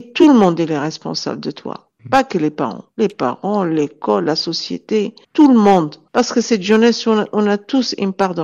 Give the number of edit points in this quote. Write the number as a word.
four